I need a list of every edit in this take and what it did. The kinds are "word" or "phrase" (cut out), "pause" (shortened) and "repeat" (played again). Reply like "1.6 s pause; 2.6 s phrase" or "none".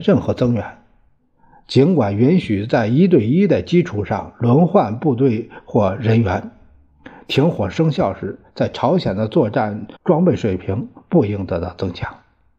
10.0 s pause